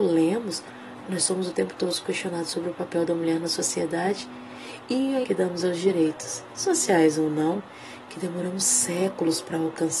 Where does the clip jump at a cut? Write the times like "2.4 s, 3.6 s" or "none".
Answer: 1.1 s, 5.2 s

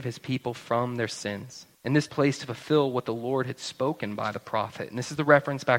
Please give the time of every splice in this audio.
1.7 s, 2.1 s

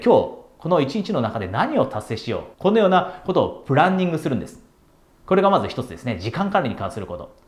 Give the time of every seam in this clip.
2.5 s

